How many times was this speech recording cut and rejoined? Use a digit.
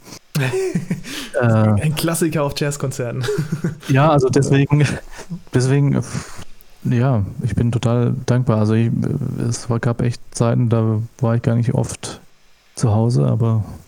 0